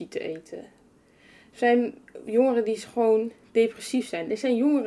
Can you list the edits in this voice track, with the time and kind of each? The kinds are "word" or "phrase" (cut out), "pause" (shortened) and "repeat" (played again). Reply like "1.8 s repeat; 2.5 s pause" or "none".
none